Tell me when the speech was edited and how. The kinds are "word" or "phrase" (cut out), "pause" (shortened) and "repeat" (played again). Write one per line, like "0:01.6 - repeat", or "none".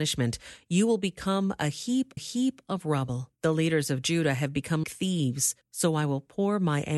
0:02.2 - repeat
0:03.4 - pause
0:04.8 - word
0:05.6 - pause

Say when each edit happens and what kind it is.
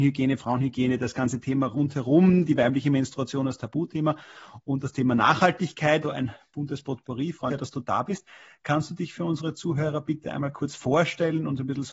0:06.0 - word
0:07.5 - word

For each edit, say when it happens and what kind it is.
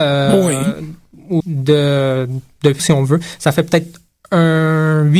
0:01.4 - word
0:02.8 - phrase

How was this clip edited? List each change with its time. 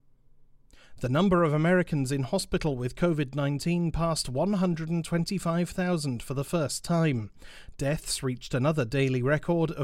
none

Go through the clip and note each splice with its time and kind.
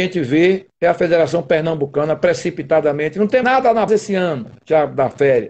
0:03.4 - word
0:03.9 - word

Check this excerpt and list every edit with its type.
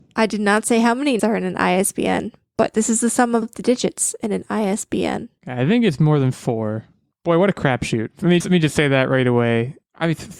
0:01.2 - word
0:03.4 - word
0:08.4 - word

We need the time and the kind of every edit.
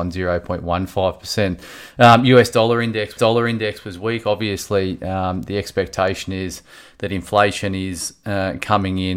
0:03.2 - repeat

